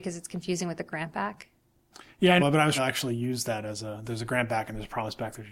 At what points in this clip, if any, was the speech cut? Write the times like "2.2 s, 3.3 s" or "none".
2.4 s, 2.7 s